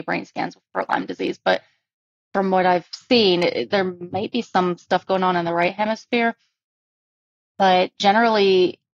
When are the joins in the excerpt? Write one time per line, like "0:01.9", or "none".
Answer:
none

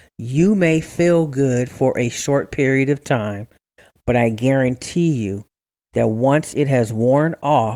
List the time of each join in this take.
none

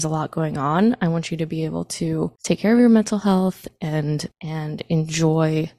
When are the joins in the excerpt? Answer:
0:02.4
0:04.3

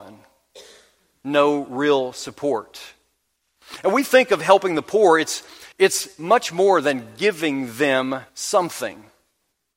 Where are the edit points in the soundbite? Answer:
0:05.7
0:08.3

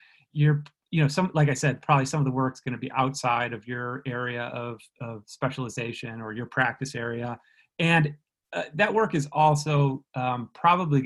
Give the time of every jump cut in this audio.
none

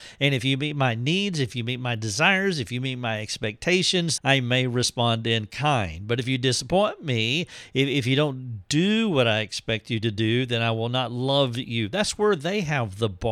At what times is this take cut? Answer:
0:04.2

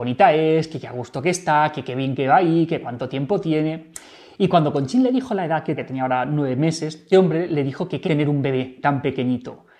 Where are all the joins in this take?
0:05.8
0:07.1
0:08.0

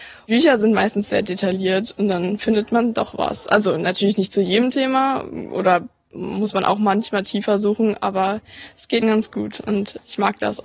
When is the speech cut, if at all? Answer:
0:09.0

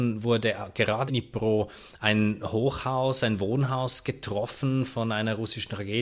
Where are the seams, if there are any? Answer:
0:01.1

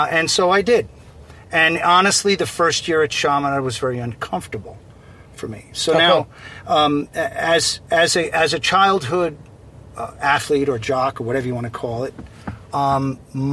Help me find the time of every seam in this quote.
none

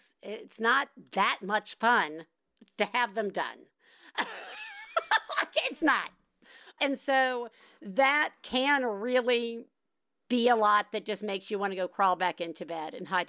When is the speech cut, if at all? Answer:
none

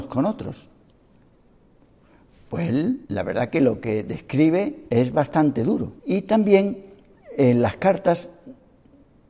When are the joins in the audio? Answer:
0:03.0
0:04.9
0:06.0

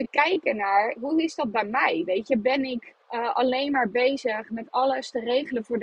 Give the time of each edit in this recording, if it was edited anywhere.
0:03.0

